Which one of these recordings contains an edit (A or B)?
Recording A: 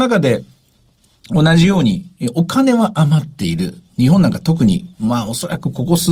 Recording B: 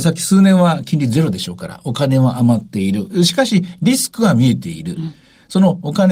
A